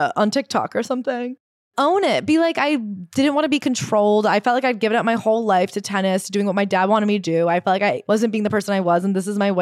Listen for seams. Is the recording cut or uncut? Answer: uncut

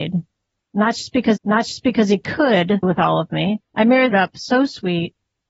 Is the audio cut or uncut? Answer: cut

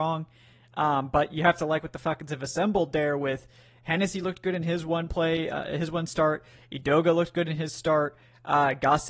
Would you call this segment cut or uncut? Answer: uncut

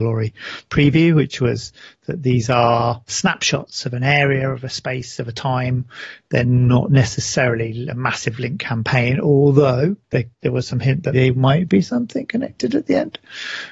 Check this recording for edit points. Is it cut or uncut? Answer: cut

